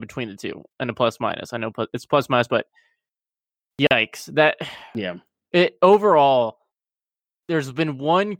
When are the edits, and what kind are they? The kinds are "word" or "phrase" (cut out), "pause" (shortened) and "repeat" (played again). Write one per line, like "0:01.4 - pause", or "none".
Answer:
none